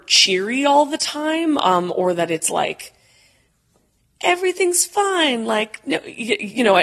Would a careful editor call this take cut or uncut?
uncut